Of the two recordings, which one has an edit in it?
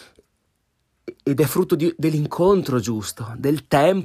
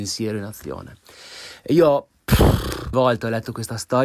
second; 1 cut; at 2.9 s

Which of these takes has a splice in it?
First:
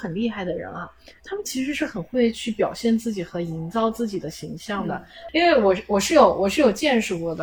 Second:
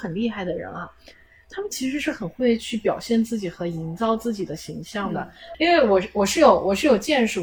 first; 1 cut; at 1.2 s

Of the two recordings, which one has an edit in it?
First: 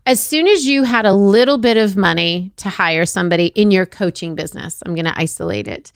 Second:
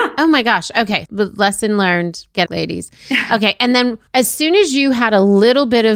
second; 3 cuts; at 1.0 s, 2.5 s, 4.1 s

